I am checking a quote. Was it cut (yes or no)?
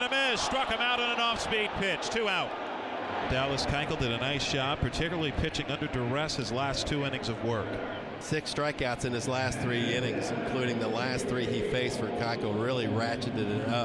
no